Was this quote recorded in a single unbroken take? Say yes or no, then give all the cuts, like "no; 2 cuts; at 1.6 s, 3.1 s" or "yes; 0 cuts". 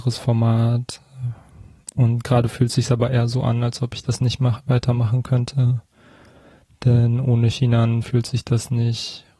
yes; 0 cuts